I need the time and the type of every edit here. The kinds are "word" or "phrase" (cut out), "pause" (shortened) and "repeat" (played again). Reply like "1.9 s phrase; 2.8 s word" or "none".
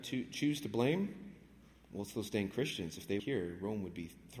3.2 s word